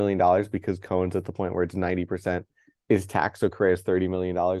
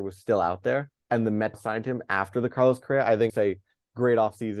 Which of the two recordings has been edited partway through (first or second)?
second